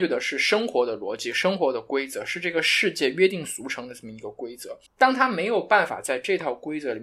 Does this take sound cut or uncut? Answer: cut